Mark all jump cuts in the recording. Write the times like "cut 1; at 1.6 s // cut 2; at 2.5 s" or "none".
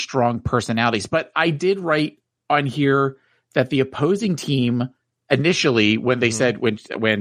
none